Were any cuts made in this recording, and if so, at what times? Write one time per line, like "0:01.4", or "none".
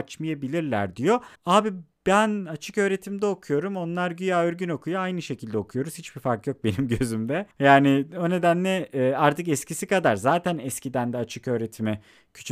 0:01.3
0:07.5